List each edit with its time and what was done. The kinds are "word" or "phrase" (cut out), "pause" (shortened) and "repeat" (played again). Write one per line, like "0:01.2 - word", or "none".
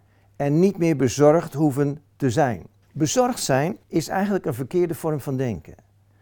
0:02.8 - pause
0:03.8 - pause